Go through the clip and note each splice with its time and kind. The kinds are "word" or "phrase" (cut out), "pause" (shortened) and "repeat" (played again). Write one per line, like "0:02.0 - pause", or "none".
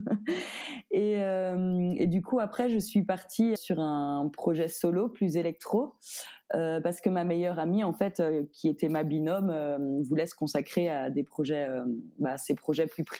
0:03.6 - word